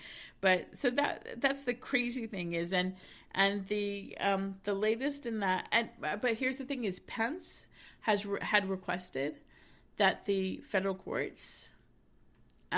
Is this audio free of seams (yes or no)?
yes